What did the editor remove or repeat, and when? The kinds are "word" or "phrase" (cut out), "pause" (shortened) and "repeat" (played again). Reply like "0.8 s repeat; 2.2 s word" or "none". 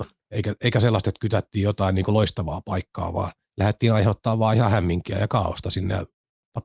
3.4 s pause